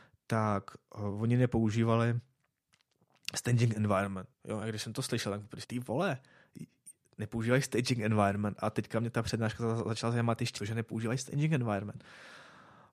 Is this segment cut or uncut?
cut